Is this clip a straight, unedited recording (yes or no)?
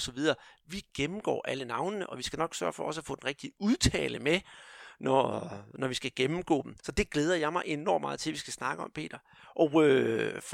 no